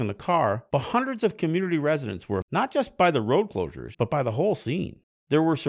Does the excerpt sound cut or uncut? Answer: cut